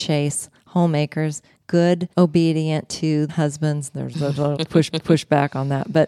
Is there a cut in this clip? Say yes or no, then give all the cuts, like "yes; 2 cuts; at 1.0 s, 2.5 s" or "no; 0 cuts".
yes; 5 cuts; at 2.1 s, 3.3 s, 4.1 s, 4.6 s, 4.9 s